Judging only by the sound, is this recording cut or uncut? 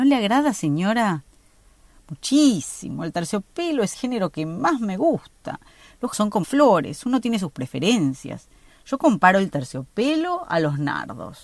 cut